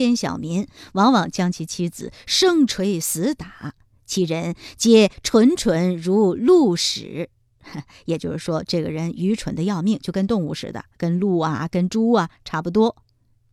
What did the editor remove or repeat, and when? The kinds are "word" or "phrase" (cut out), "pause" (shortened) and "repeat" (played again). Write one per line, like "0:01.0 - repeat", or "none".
none